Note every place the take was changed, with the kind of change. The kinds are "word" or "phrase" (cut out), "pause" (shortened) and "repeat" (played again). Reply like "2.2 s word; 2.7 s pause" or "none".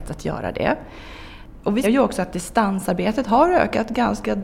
1.8 s word